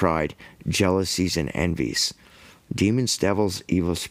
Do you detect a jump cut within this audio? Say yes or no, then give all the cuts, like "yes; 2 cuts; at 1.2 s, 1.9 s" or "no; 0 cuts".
no; 0 cuts